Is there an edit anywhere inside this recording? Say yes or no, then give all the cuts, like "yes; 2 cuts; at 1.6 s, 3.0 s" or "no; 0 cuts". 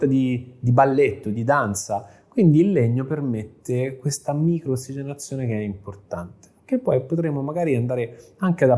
no; 0 cuts